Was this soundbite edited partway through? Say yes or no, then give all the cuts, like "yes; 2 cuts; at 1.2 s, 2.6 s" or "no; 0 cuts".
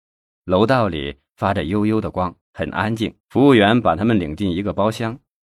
yes; 2 cuts; at 2.4 s, 3.2 s